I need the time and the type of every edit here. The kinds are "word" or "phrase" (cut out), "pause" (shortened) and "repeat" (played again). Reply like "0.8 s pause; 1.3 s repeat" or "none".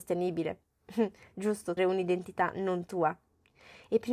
1.8 s word